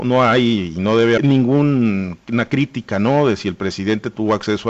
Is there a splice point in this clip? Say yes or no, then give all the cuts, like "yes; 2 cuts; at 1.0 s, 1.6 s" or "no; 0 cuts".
yes; 1 cut; at 1.2 s